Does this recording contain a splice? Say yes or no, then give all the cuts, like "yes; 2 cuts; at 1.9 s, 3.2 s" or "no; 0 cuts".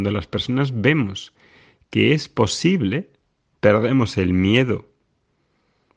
no; 0 cuts